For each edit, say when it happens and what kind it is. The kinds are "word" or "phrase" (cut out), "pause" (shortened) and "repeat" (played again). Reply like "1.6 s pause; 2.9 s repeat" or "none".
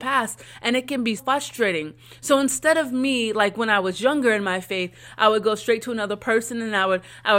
1.2 s word